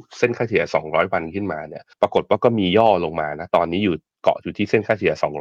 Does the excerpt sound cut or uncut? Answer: cut